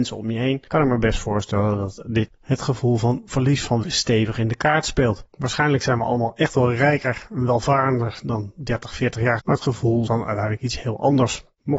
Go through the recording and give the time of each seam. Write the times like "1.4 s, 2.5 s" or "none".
3.8 s, 9.4 s, 10.1 s